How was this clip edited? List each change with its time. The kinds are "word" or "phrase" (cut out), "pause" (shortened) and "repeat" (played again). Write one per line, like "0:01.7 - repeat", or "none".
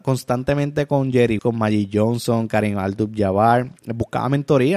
0:01.4 - word
0:03.8 - pause